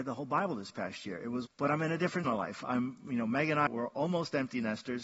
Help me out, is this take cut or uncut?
cut